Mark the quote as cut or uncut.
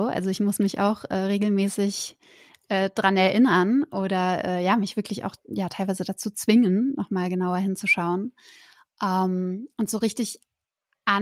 uncut